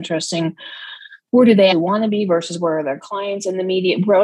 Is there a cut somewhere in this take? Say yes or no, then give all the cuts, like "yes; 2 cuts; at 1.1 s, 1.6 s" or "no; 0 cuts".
yes; 1 cut; at 1.7 s